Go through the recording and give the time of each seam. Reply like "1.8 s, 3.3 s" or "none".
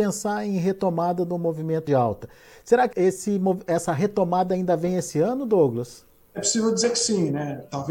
1.9 s, 2.9 s